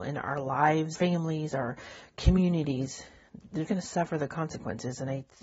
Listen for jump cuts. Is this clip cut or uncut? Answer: cut